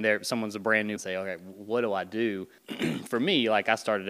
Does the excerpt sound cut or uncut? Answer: cut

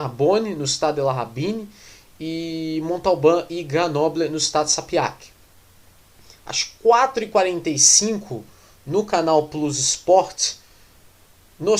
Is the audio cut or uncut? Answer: uncut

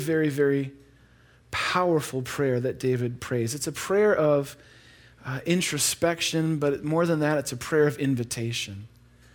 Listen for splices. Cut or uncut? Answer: uncut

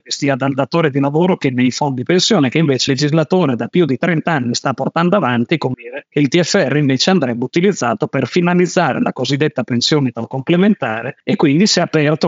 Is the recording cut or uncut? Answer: cut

